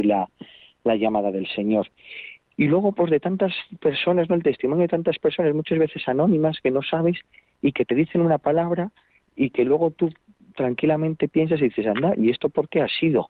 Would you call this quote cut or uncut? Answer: uncut